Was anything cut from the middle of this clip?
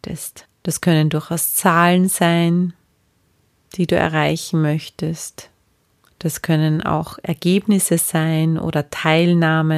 no; 0 cuts

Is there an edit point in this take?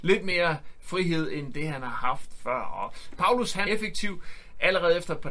yes; 1 cut; at 3.7 s

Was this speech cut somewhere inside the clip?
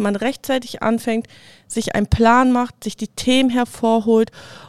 no; 0 cuts

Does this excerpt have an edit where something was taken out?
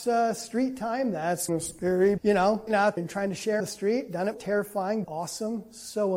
yes; 7 cuts; at 1.5 s, 2.2 s, 2.7 s, 3.0 s, 3.6 s, 4.3 s, 5.0 s

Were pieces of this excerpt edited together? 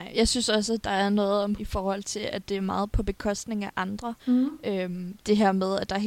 yes; 2 cuts; at 1.6 s, 4.2 s

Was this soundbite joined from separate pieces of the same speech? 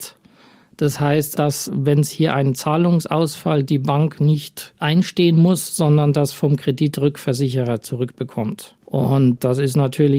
yes; 3 cuts; at 1.4 s, 3.7 s, 8.8 s

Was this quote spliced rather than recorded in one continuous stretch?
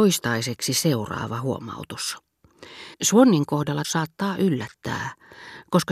yes; 2 cuts; at 2.9 s, 3.8 s

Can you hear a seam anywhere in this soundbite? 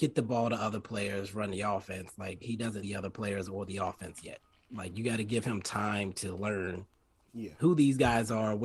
yes; 1 cut; at 2.8 s

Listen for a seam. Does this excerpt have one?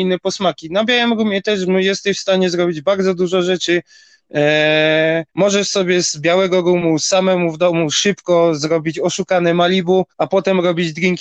yes; 2 cuts; at 5.3 s, 10.1 s

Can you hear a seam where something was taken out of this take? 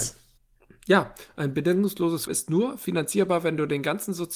yes; 1 cut; at 2.3 s

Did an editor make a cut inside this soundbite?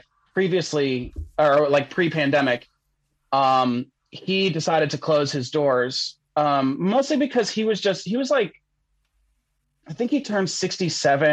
no; 0 cuts

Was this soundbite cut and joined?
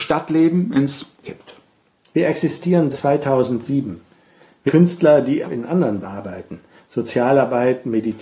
yes; 5 cuts; at 1.2 s, 2.9 s, 4.7 s, 5.4 s, 6.0 s

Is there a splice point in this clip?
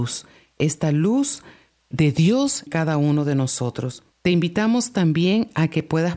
yes; 3 cuts; at 1.9 s, 2.7 s, 4.1 s

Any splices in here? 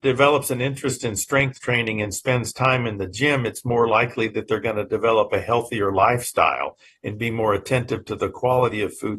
no; 0 cuts

